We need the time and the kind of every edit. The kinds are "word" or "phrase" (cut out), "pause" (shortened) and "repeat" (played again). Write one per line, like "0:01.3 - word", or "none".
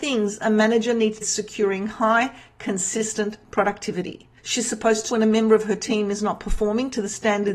0:01.2 - phrase
0:04.4 - pause
0:05.1 - word